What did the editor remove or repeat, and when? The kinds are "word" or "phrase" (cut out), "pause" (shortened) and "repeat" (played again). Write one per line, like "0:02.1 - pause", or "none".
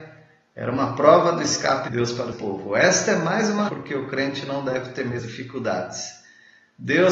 0:01.9 - word
0:02.3 - word
0:03.7 - word
0:05.2 - word